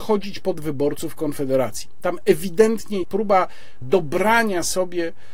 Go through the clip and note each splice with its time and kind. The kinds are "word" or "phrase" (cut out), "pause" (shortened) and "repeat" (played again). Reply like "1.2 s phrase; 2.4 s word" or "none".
3.0 s word; 3.8 s word